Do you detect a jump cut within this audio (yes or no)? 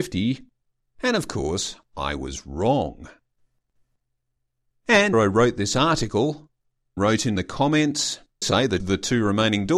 yes